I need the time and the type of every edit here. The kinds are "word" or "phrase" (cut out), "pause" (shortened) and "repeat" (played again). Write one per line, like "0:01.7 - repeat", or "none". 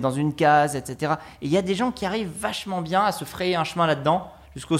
none